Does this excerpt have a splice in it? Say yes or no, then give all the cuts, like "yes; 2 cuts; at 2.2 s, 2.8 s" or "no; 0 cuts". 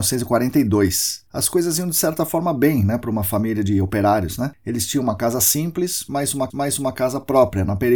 yes; 2 cuts; at 1.3 s, 6.5 s